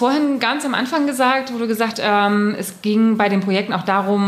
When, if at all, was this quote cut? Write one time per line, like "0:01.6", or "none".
0:01.9